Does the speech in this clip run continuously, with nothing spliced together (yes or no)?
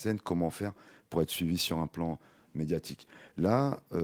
yes